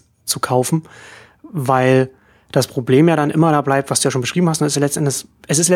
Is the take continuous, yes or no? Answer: yes